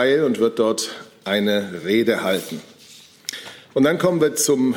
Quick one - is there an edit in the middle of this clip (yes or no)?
no